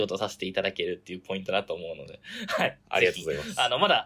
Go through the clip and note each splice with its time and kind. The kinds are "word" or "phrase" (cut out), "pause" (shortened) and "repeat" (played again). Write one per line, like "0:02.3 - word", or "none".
none